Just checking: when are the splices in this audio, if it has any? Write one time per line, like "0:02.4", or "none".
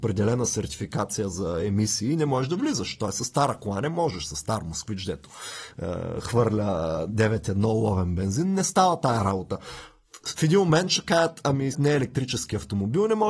0:11.7